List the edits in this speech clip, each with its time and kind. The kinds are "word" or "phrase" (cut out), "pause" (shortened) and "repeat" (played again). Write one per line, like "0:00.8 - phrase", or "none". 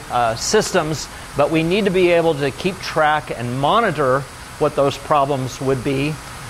none